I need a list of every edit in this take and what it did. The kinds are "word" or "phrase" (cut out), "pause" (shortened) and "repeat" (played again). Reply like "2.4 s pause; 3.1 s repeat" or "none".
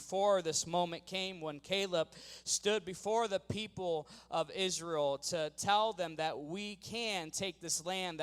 none